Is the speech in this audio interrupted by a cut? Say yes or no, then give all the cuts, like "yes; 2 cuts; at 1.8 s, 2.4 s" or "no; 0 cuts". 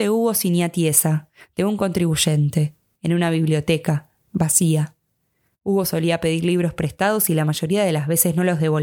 no; 0 cuts